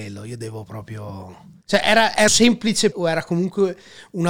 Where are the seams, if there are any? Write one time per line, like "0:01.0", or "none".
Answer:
0:01.6
0:02.3
0:02.9